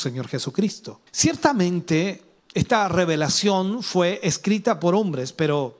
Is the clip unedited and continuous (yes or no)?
no